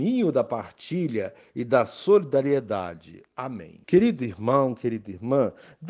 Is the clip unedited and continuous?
no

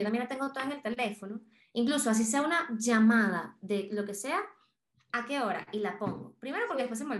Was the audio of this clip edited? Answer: no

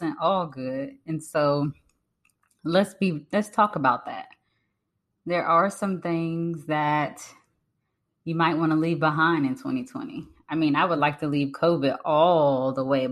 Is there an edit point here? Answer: no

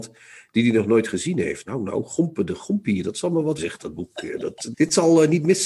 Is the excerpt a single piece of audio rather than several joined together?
no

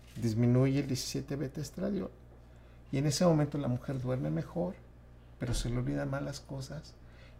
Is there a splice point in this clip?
no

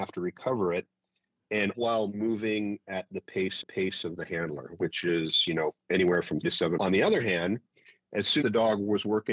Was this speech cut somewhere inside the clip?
yes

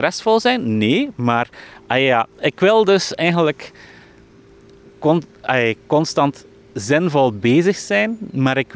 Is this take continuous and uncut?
yes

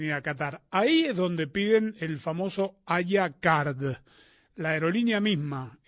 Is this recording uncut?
yes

